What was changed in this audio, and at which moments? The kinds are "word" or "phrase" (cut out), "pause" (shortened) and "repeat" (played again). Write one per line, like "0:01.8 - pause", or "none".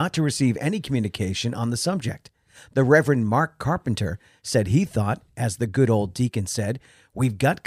none

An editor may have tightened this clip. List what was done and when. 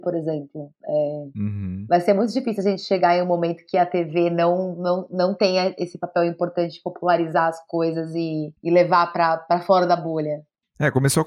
0:08.5 - pause

